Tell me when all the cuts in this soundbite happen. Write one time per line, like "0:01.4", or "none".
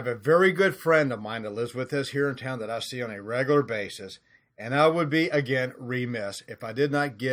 none

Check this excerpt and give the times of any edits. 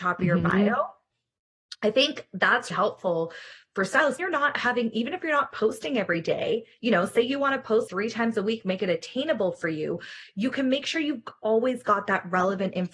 0:02.7
0:04.2
0:07.9

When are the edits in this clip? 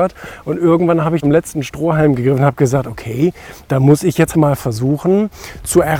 0:01.2
0:04.3

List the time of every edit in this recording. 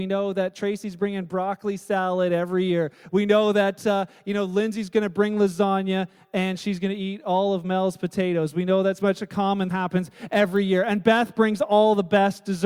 0:09.0
0:09.7

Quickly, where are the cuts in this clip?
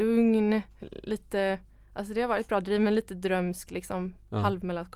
none

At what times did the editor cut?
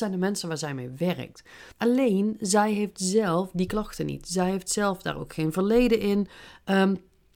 0:01.7

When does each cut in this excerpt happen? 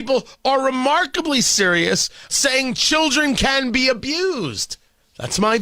0:02.3

